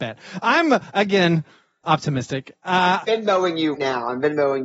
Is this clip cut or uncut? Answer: cut